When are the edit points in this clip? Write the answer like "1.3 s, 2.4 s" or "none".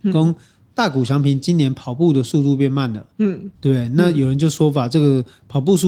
3.5 s